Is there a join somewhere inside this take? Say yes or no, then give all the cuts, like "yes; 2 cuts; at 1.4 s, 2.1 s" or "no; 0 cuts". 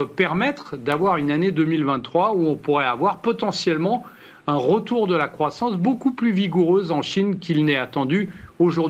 no; 0 cuts